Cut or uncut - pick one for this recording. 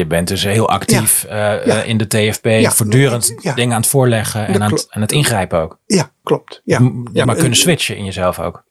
cut